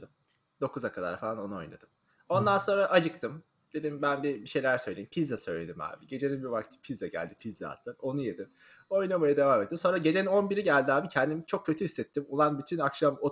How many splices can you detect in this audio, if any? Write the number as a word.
zero